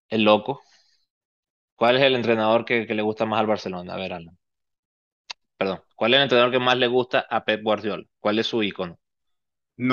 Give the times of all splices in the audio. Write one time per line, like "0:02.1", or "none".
0:01.4